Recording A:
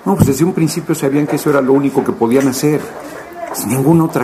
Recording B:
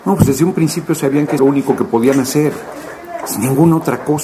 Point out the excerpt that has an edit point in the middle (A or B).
B